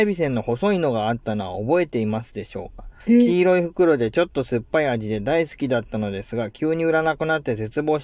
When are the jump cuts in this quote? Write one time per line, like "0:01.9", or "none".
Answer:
0:03.0